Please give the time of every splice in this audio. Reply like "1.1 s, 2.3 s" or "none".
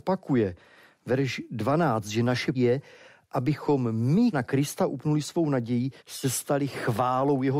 2.5 s, 4.3 s, 6.0 s